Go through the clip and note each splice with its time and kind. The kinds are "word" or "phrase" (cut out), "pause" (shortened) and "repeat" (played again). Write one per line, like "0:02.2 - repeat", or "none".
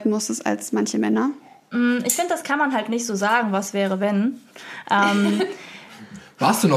none